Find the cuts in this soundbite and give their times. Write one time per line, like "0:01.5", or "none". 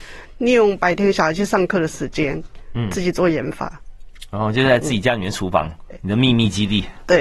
0:05.9

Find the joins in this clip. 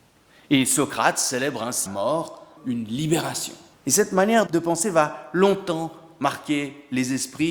0:01.9
0:02.6
0:03.7
0:04.5

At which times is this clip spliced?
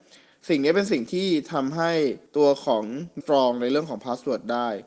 0:02.3
0:03.2

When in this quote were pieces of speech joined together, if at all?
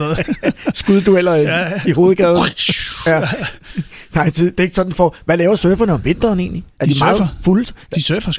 0:06.7

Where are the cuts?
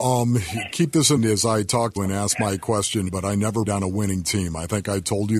0:01.2
0:02.0
0:03.1
0:03.7

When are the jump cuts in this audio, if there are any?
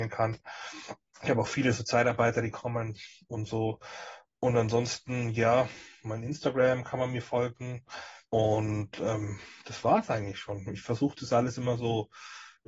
0:01.1
0:08.3

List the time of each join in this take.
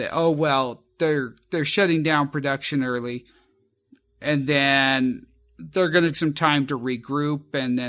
0:06.1

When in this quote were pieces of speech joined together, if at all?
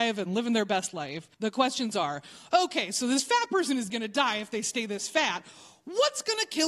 0:01.3
0:03.9

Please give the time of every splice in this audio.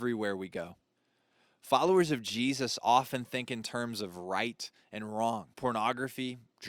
0:01.0
0:05.5

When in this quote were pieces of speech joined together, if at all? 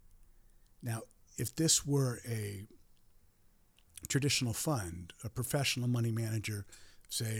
none

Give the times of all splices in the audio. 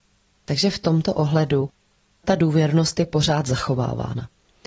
0:02.2

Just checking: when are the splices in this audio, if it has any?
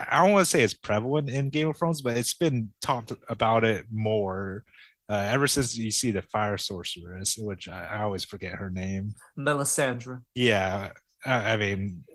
0:02.8

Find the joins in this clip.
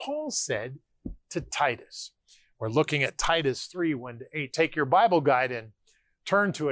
none

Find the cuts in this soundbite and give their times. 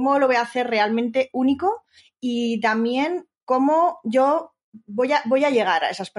0:03.4

